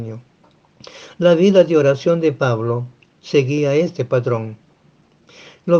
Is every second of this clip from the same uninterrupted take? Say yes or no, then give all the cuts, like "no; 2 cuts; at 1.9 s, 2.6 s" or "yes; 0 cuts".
yes; 0 cuts